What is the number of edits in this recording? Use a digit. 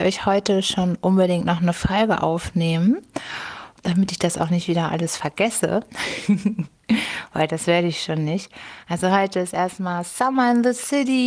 1